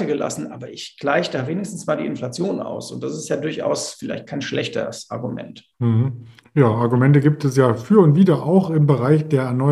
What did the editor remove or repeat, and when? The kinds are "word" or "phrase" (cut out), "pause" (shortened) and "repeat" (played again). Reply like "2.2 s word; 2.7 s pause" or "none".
5.7 s pause